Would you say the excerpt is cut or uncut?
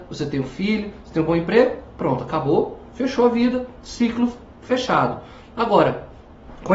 uncut